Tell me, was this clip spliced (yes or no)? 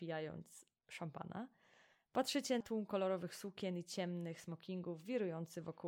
yes